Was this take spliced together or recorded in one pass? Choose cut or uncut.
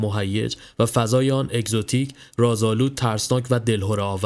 uncut